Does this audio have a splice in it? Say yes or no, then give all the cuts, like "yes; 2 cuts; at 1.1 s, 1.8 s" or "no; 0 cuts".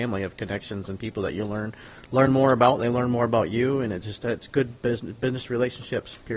no; 0 cuts